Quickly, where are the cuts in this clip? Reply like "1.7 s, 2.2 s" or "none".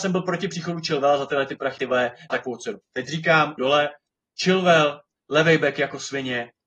1.8 s, 2.3 s, 3.6 s, 5.2 s